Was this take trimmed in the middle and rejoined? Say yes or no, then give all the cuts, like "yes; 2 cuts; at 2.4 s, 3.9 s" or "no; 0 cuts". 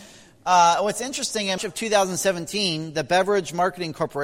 yes; 1 cut; at 1.6 s